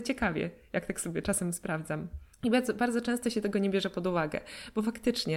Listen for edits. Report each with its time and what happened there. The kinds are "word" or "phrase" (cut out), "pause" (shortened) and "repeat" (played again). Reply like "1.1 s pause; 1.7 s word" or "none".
2.3 s pause